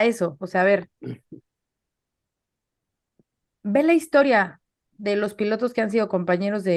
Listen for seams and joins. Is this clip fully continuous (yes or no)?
yes